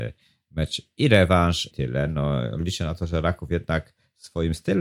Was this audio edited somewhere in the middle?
yes; 1 cut; at 1.7 s

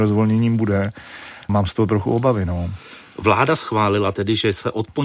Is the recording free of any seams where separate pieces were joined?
no; 1 cut; at 1.5 s

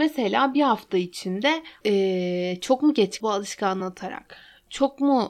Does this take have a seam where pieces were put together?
yes; 3 cuts; at 1.8 s, 3.2 s, 3.8 s

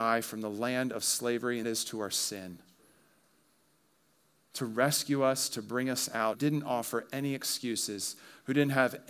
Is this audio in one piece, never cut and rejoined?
no; 2 cuts; at 1.6 s, 6.3 s

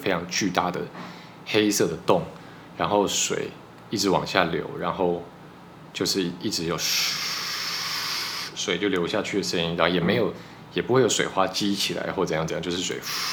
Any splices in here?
no; 0 cuts

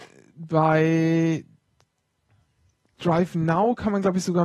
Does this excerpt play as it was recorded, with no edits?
yes; 0 cuts

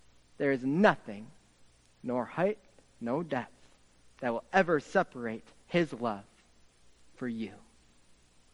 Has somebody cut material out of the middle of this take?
no; 0 cuts

